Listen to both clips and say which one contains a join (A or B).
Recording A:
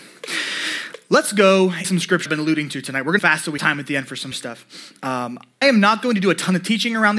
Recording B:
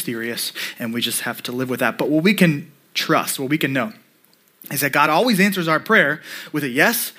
A